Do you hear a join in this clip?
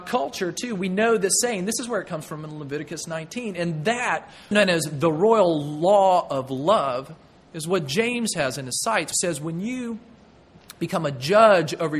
yes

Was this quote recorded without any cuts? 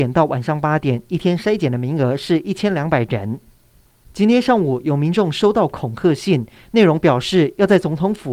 yes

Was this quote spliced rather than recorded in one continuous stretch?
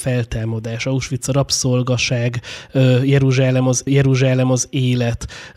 yes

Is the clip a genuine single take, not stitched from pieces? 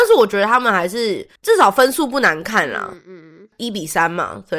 no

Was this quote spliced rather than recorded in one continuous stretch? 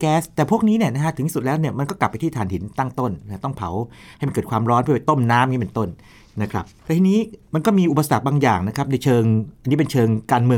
no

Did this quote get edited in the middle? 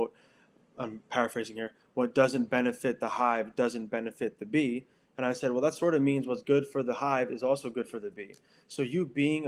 no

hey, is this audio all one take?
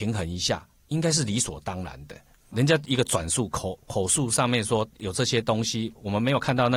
yes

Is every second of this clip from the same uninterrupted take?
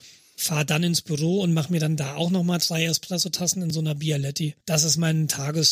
no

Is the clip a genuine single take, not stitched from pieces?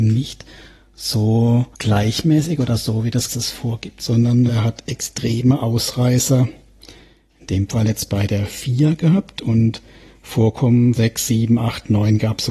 no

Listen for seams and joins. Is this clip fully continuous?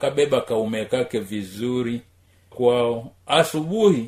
no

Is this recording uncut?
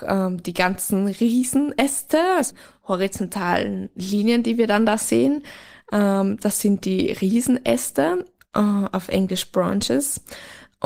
yes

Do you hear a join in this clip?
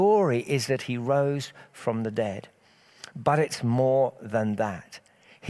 no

